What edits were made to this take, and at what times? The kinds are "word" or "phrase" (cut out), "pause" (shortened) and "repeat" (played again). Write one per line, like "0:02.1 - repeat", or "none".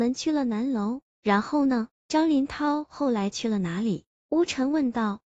0:01.9 - pause